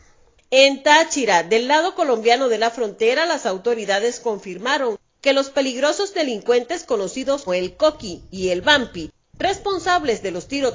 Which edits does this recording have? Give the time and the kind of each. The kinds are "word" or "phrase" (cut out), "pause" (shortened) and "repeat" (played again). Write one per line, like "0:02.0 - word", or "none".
0:07.5 - word